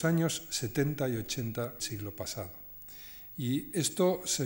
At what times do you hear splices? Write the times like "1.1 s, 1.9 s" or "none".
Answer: 1.8 s